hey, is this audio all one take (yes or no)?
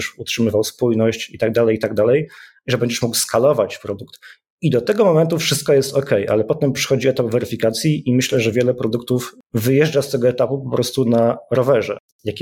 yes